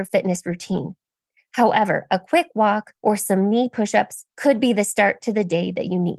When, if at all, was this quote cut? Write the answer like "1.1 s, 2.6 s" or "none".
3.0 s, 4.3 s